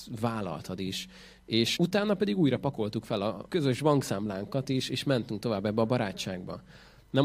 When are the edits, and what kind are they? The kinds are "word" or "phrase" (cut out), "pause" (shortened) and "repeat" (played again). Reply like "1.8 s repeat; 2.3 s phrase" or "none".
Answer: 1.8 s word; 3.5 s word